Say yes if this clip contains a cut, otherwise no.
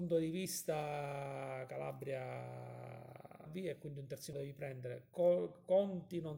yes